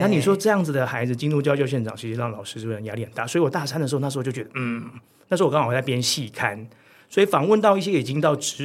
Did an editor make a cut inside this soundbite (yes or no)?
no